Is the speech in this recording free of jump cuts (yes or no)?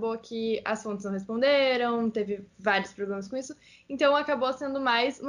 yes